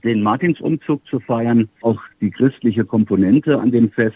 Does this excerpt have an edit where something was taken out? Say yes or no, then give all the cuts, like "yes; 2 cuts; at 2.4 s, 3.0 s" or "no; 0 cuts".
yes; 1 cut; at 1.8 s